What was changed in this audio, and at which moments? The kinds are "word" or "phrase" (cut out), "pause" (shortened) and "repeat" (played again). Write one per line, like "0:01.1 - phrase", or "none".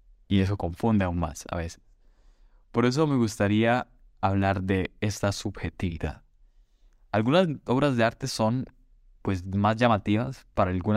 none